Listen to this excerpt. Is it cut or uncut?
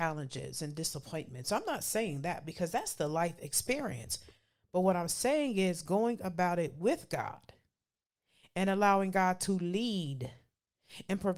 uncut